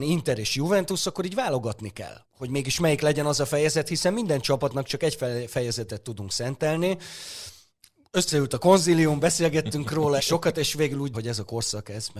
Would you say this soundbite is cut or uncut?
cut